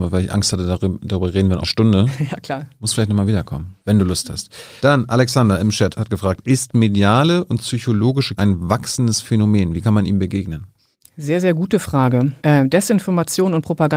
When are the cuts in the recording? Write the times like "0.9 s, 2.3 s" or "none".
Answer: 1.6 s, 3.8 s, 4.8 s, 5.9 s, 8.4 s, 10.9 s, 12.4 s